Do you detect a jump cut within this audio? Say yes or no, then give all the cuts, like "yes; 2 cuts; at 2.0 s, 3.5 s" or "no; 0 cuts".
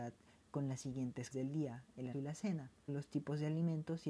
yes; 3 cuts; at 1.3 s, 2.1 s, 2.9 s